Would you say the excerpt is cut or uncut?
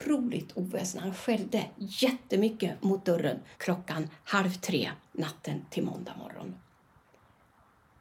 cut